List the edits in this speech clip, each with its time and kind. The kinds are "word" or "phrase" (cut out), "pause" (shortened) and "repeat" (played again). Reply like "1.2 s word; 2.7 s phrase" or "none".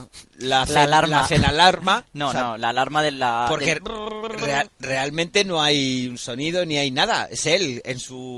none